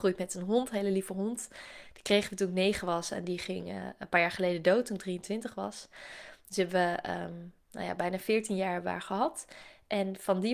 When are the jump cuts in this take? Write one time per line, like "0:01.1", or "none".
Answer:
0:07.6